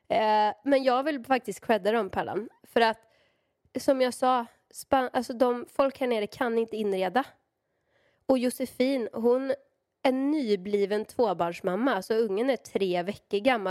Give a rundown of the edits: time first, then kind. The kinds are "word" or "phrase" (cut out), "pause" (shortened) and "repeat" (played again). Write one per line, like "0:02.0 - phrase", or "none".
none